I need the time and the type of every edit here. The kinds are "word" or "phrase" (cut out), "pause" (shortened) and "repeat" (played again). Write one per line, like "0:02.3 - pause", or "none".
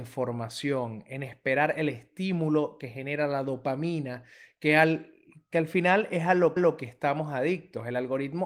0:06.6 - repeat